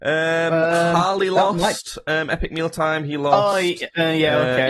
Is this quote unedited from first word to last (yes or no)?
yes